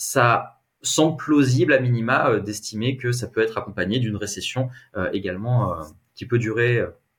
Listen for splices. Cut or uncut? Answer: uncut